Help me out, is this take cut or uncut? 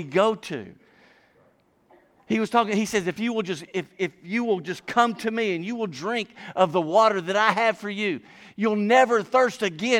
uncut